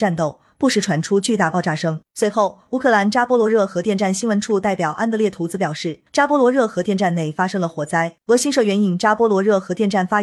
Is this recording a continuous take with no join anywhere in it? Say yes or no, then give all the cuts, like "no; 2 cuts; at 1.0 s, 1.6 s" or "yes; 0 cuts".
no; 3 cuts; at 2.1 s, 6.1 s, 8.2 s